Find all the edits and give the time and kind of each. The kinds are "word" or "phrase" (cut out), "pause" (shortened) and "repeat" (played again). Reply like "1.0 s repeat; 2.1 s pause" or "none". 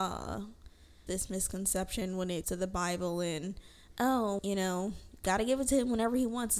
1.1 s word; 2.4 s word; 4.4 s word